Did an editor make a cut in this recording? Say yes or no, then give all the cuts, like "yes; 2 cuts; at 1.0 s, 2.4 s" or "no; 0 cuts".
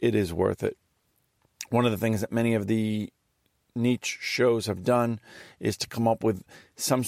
no; 0 cuts